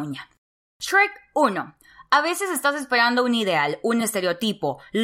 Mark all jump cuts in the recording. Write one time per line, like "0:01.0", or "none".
none